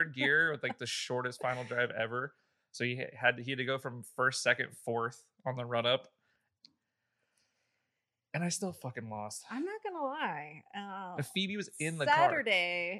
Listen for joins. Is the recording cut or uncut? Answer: uncut